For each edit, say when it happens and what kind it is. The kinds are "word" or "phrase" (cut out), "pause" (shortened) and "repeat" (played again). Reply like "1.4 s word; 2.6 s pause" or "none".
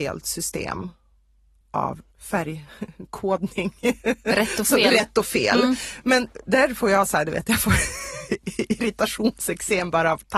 2.1 s pause